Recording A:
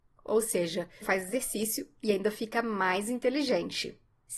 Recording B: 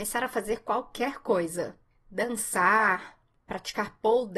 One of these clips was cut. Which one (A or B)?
A